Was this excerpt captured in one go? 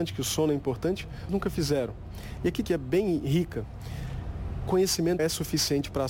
no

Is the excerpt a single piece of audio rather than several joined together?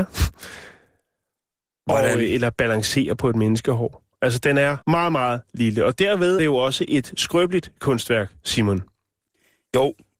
no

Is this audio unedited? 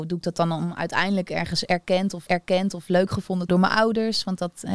no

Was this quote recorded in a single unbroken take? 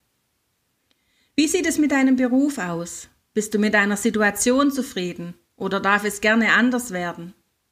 yes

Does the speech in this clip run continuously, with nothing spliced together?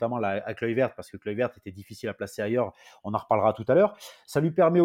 yes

